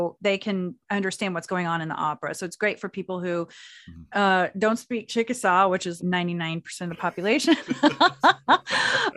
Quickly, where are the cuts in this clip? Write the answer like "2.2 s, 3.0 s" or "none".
6.0 s